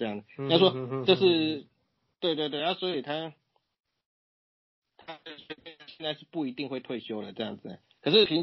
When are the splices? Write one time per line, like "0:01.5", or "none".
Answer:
none